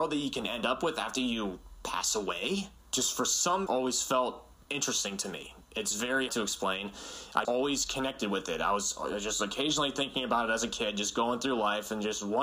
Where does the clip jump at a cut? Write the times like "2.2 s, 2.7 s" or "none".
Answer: 2.8 s, 3.7 s, 4.5 s, 6.3 s, 7.4 s